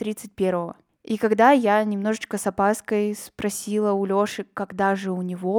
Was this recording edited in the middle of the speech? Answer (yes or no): no